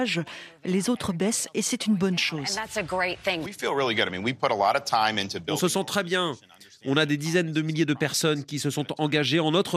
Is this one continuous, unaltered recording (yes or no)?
yes